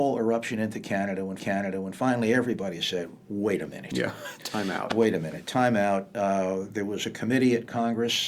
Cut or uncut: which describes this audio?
cut